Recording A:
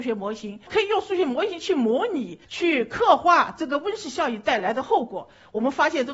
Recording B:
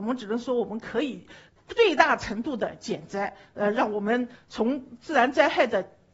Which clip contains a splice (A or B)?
A